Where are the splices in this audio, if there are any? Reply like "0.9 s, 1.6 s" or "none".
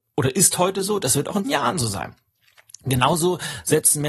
1.4 s